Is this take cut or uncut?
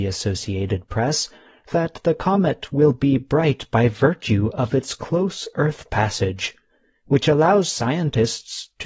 uncut